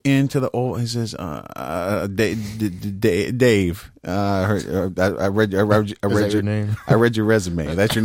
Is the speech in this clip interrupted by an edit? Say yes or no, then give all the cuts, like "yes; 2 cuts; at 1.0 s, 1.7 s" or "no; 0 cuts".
no; 0 cuts